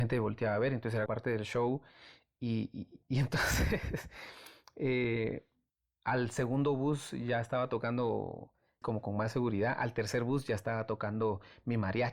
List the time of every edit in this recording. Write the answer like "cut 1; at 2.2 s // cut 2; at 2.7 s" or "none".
cut 1; at 1.1 s // cut 2; at 3.0 s // cut 3; at 5.7 s // cut 4; at 8.8 s